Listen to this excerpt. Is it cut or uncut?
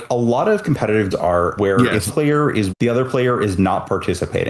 cut